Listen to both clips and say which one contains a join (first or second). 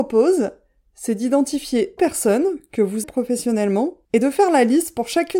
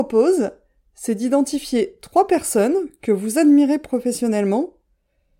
first